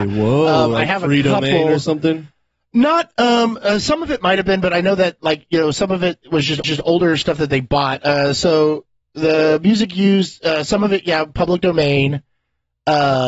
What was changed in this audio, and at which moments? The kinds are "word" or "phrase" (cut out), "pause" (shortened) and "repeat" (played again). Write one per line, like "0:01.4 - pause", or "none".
0:06.6 - repeat